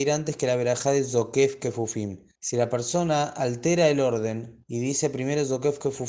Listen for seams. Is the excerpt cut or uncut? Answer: cut